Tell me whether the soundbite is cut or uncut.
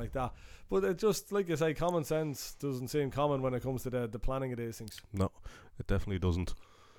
uncut